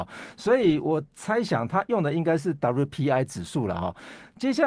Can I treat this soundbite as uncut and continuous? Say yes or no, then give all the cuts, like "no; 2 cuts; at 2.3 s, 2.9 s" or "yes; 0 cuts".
yes; 0 cuts